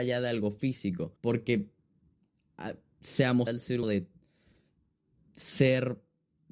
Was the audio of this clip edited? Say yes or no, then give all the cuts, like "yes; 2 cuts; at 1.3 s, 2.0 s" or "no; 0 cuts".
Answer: yes; 3 cuts; at 1.2 s, 3.5 s, 3.8 s